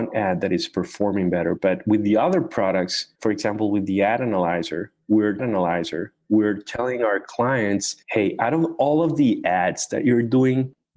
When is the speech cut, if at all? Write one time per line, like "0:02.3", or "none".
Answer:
0:03.2
0:05.4
0:08.0